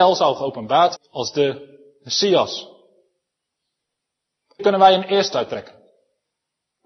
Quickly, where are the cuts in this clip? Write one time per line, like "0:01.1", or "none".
0:01.0
0:04.6
0:05.3